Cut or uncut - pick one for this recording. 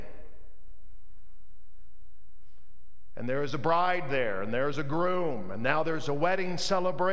uncut